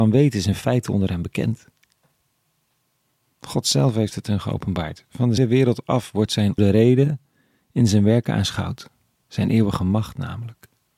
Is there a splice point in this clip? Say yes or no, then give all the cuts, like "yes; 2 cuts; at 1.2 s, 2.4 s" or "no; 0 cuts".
yes; 2 cuts; at 5.4 s, 6.6 s